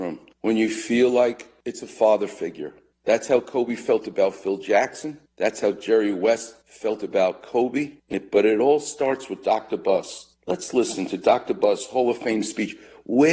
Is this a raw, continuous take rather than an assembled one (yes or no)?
yes